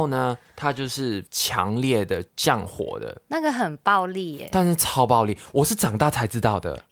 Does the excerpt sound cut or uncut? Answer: cut